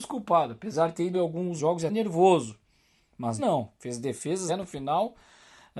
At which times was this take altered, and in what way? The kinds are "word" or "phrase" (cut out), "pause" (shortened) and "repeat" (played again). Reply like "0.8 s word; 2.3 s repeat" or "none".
1.1 s word; 1.6 s word; 1.9 s word; 3.4 s word; 4.5 s word